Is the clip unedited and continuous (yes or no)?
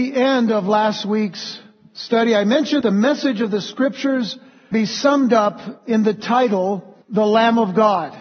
no